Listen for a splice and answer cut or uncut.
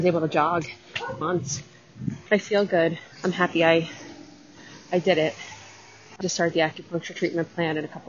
cut